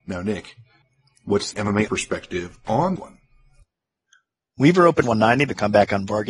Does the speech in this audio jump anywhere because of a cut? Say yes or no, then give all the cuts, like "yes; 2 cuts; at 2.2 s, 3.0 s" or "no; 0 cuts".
yes; 4 cuts; at 1.5 s, 1.9 s, 3.0 s, 5.0 s